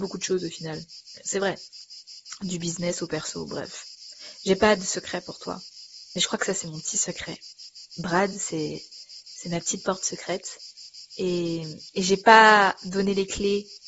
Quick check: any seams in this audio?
no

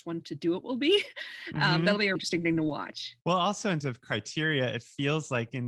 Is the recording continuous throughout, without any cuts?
no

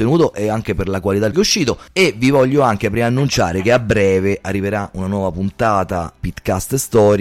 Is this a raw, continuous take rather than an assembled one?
no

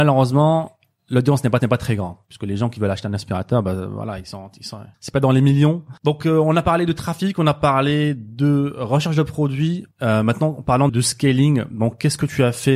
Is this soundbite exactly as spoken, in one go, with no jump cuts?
no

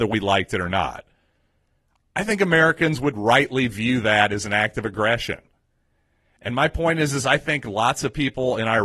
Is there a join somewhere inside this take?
no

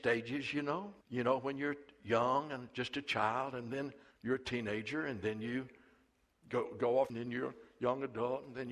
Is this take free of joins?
no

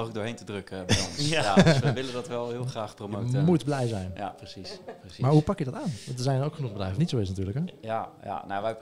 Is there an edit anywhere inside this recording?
yes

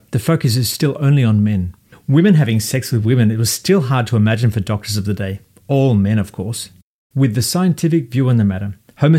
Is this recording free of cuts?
yes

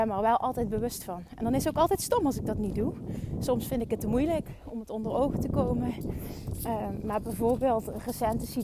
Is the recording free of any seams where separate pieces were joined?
yes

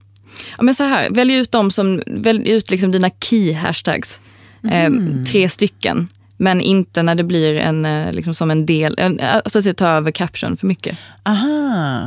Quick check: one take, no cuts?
yes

